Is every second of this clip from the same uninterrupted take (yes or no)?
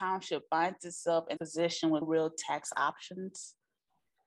no